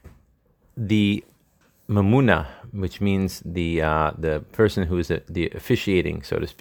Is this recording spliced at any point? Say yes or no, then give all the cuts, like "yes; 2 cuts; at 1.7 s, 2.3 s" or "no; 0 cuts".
no; 0 cuts